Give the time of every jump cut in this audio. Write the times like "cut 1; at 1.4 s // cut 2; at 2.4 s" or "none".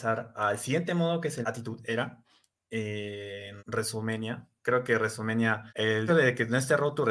cut 1; at 1.4 s // cut 2; at 3.6 s // cut 3; at 5.7 s // cut 4; at 6.1 s